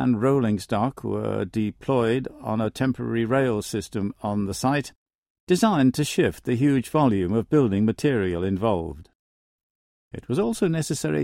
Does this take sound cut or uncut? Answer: uncut